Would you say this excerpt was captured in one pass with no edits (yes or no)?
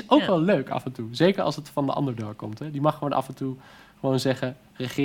yes